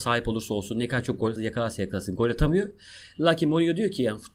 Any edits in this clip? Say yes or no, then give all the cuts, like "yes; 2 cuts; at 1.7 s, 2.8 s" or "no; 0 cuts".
yes; 1 cut; at 1.4 s